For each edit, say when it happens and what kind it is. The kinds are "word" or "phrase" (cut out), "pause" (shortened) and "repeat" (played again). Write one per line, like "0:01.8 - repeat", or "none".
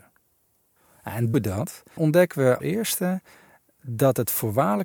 0:01.3 - word
0:02.0 - word
0:02.6 - word